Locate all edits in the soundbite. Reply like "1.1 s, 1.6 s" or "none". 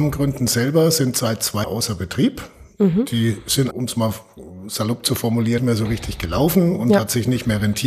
1.6 s, 3.7 s, 5.6 s